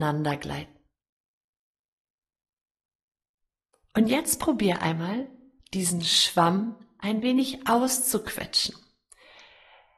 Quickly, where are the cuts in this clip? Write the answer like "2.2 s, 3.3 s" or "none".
none